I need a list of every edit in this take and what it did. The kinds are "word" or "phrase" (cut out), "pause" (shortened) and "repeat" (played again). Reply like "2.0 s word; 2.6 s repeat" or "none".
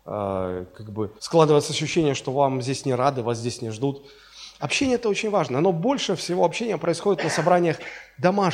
1.2 s pause